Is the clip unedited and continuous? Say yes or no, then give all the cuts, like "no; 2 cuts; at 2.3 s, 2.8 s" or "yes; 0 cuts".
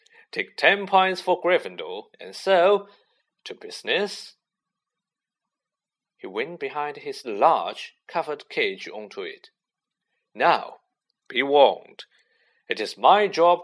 no; 3 cuts; at 2.1 s, 6.6 s, 7.2 s